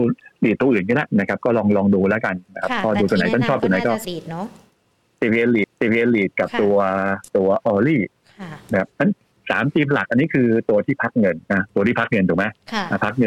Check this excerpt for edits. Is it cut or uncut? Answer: cut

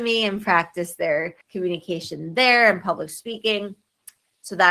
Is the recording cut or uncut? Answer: cut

